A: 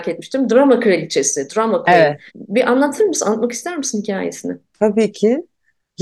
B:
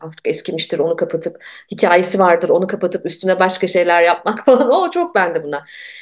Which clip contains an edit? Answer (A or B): A